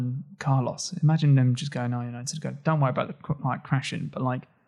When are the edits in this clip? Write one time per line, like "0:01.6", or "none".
none